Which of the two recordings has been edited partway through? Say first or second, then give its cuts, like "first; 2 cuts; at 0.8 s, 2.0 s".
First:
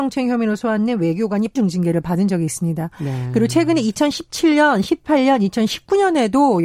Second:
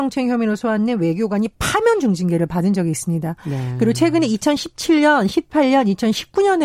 first; 1 cut; at 1.6 s